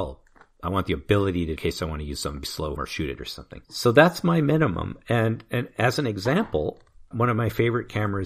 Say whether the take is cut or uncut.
cut